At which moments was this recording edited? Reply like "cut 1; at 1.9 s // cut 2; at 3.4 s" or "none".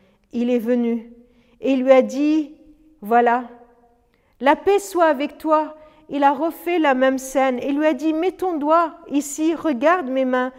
none